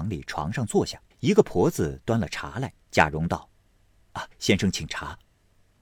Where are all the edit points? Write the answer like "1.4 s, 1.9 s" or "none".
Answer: 1.1 s, 2.8 s, 3.6 s, 4.3 s